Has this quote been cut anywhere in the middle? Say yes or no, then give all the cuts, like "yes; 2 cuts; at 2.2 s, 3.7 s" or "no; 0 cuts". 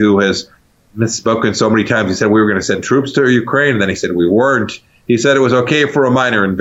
no; 0 cuts